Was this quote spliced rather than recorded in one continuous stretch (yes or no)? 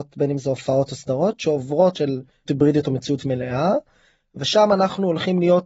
yes